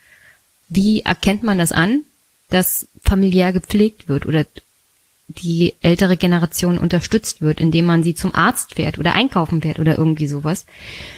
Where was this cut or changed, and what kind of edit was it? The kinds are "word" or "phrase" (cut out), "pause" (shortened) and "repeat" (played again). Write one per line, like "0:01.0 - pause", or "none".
none